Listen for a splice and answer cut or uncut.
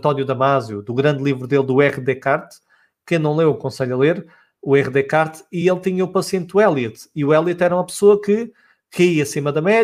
uncut